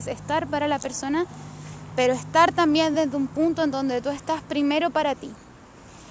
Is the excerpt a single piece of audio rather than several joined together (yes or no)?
yes